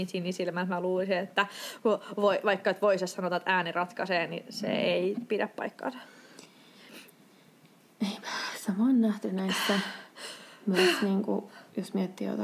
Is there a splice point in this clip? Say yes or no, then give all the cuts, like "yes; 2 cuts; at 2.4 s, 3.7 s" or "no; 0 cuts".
no; 0 cuts